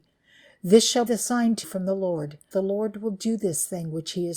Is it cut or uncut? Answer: cut